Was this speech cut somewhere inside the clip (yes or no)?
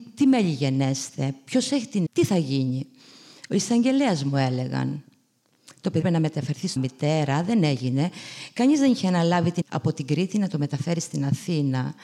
yes